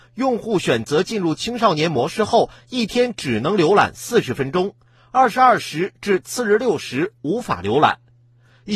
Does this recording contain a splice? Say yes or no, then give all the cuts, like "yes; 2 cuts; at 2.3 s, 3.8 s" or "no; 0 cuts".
no; 0 cuts